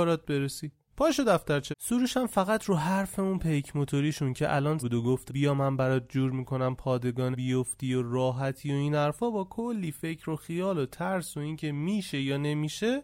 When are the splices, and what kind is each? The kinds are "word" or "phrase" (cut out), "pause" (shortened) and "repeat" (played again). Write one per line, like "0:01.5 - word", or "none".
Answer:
0:01.7 - word
0:04.8 - word
0:05.3 - word
0:07.3 - word